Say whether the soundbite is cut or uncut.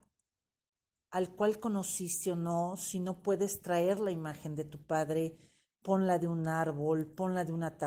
uncut